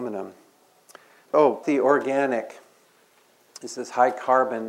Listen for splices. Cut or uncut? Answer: cut